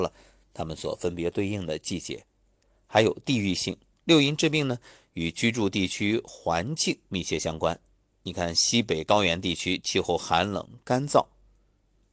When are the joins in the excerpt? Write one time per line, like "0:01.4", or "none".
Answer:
0:03.9